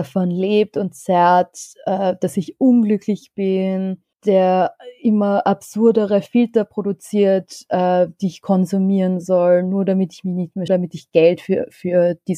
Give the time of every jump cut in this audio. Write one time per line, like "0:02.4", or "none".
0:04.1
0:10.7